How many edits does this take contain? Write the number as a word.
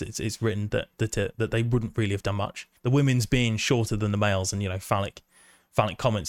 one